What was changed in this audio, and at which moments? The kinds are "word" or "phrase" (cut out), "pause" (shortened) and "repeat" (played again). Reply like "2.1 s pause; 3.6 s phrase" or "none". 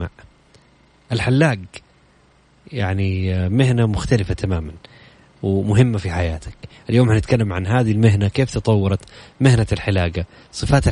none